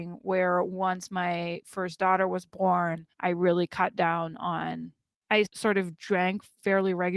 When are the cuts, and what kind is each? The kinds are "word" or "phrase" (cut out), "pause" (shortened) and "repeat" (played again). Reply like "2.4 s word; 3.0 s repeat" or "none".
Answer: 3.1 s pause; 5.5 s word